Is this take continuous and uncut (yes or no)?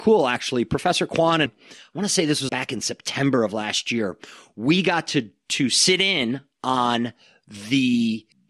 no